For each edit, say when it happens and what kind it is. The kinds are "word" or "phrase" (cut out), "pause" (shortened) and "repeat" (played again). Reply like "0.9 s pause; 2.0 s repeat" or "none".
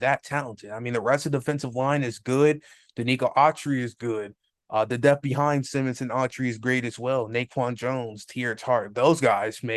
none